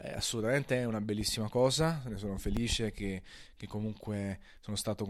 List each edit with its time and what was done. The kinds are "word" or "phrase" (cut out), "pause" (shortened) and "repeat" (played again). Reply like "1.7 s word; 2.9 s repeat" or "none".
none